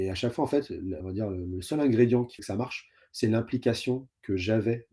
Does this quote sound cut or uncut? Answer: cut